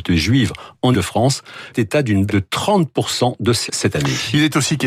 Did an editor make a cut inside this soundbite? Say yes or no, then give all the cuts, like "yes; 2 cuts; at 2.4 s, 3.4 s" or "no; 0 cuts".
yes; 4 cuts; at 0.9 s, 1.7 s, 2.3 s, 3.7 s